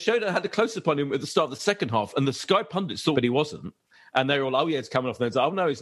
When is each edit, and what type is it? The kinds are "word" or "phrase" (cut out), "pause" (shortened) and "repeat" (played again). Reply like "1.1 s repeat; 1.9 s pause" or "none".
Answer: 3.1 s phrase